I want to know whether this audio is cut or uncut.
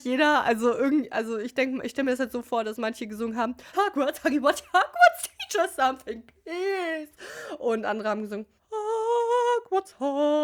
cut